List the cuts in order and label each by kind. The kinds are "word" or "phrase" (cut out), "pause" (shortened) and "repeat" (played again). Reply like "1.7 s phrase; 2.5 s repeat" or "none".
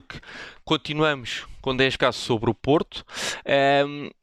2.0 s phrase